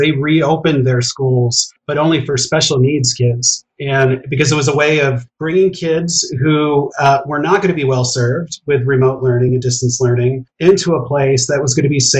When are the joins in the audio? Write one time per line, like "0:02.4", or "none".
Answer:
none